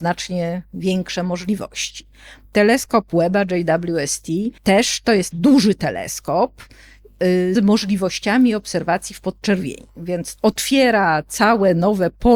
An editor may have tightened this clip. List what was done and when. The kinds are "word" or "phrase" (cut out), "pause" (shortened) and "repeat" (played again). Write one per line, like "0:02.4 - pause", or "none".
0:04.6 - pause
0:05.3 - word
0:07.5 - word
0:10.4 - word